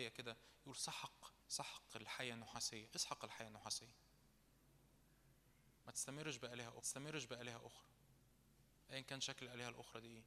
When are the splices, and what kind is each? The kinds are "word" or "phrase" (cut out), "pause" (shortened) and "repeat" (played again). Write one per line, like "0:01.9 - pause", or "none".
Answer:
0:01.4 - pause
0:05.8 - pause
0:06.8 - repeat